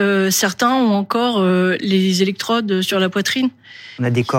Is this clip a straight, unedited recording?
yes; 0 cuts

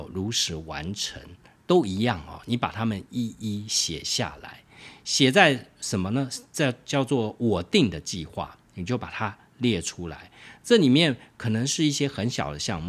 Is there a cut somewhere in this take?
no; 0 cuts

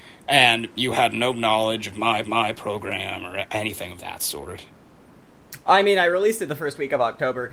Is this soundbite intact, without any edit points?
no; 1 cut; at 2.2 s

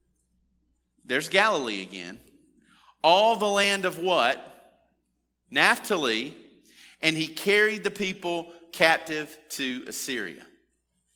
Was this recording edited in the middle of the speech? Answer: no; 0 cuts

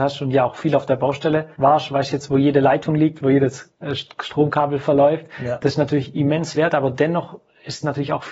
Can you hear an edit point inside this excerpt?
yes; 2 cuts; at 1.5 s, 6.6 s

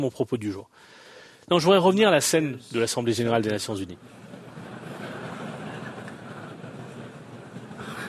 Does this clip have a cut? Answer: no; 0 cuts

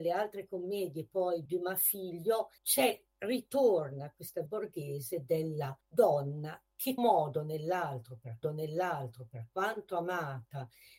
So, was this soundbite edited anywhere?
yes; 6 cuts; at 1.5 s, 2.6 s, 4.5 s, 5.8 s, 7.0 s, 8.4 s

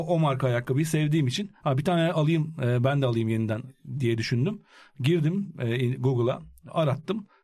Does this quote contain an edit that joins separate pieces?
no; 0 cuts

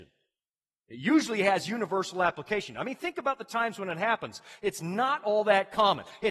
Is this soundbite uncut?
yes; 0 cuts

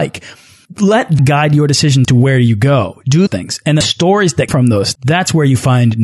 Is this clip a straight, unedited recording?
no; 6 cuts; at 1.2 s, 2.0 s, 3.3 s, 3.8 s, 4.5 s, 5.0 s

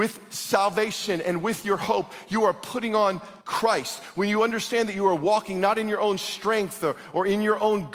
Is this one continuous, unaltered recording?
no; 1 cut; at 3.4 s

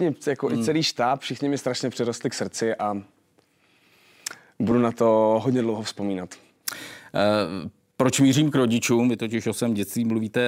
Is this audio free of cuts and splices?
yes; 0 cuts

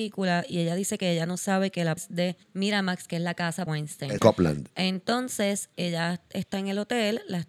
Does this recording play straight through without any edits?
no; 5 cuts; at 2.0 s, 2.4 s, 3.7 s, 4.2 s, 5.7 s

